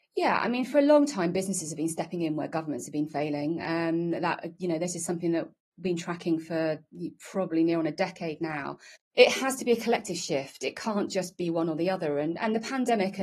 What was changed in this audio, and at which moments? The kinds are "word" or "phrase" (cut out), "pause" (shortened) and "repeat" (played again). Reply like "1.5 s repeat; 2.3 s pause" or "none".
none